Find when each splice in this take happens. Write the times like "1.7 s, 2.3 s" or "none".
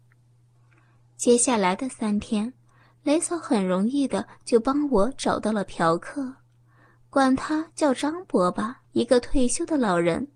8.8 s